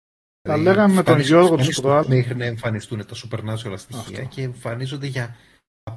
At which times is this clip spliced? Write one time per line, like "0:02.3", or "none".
0:02.0